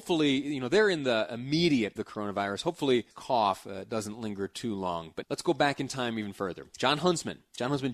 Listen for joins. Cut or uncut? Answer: cut